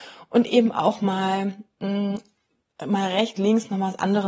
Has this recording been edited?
yes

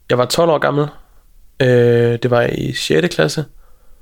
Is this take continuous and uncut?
yes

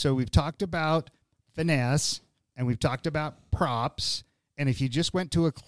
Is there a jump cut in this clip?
no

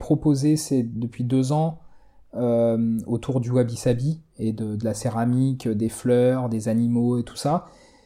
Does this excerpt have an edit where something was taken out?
no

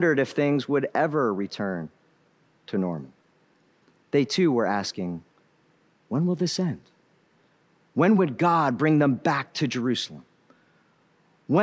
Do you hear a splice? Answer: no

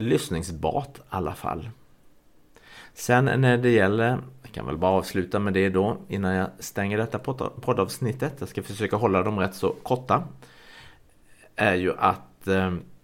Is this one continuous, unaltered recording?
yes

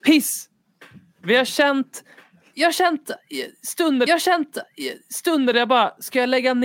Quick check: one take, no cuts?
no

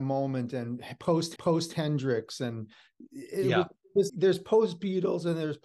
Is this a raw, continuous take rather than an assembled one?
no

